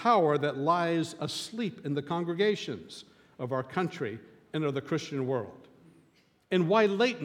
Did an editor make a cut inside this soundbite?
no; 0 cuts

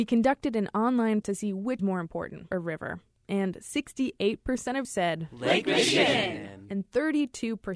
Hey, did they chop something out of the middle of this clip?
yes; 4 cuts; at 1.2 s, 1.8 s, 2.5 s, 4.8 s

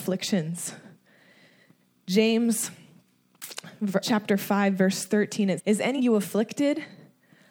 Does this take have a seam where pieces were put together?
yes; 3 cuts; at 4.0 s, 5.6 s, 6.0 s

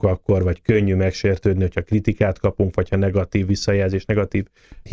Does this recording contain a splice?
no; 0 cuts

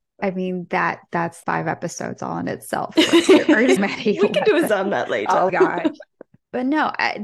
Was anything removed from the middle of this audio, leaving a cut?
yes; 4 cuts; at 1.4 s, 3.8 s, 4.7 s, 5.5 s

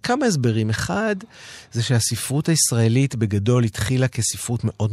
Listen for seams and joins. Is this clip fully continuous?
yes; 0 cuts

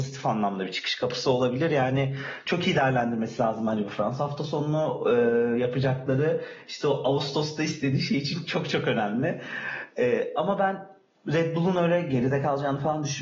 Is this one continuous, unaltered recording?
yes; 0 cuts

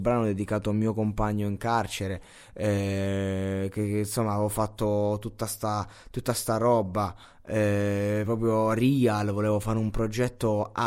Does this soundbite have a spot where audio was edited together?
no; 0 cuts

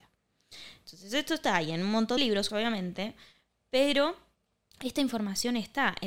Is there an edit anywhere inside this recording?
yes; 2 cuts; at 2.2 s, 2.5 s

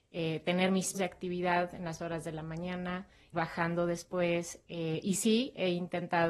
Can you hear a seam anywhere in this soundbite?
yes; 3 cuts; at 0.9 s, 2.0 s, 3.3 s

